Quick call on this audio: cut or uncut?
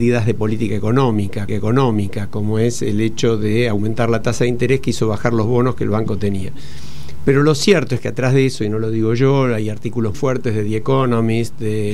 cut